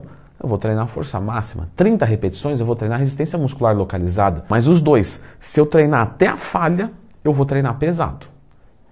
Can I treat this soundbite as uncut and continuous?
yes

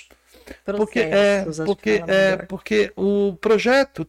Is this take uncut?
yes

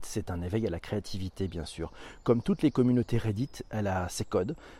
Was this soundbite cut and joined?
no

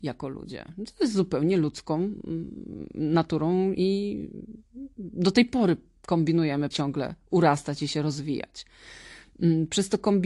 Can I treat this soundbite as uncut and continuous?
no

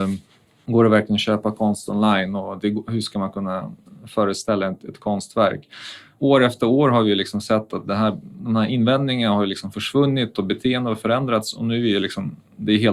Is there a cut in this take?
no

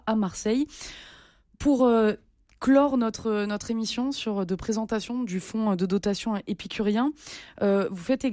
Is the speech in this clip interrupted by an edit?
no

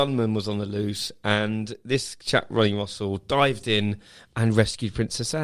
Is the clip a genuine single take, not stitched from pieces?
yes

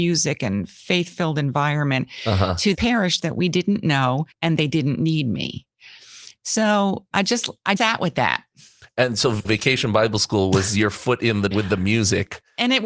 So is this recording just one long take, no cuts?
no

